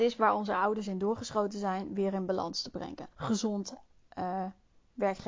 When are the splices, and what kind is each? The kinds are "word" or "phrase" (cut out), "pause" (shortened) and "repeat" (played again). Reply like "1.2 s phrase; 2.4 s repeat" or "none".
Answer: 3.1 s pause